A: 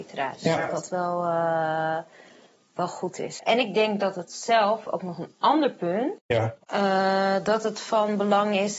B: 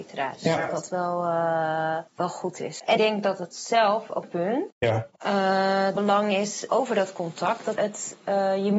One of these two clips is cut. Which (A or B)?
B